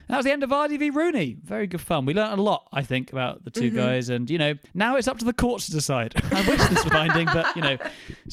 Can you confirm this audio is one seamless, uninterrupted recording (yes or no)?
no